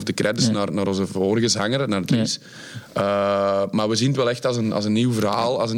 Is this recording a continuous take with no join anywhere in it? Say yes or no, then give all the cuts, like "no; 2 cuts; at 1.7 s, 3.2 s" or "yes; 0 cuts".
yes; 0 cuts